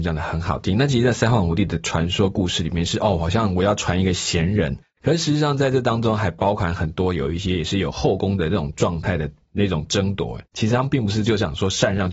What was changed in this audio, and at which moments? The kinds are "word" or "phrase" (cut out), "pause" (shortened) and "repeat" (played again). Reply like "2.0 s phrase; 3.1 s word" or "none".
10.5 s pause